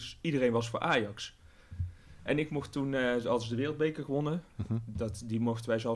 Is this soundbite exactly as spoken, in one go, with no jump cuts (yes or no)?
yes